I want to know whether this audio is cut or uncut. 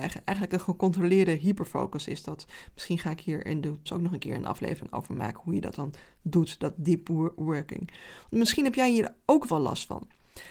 cut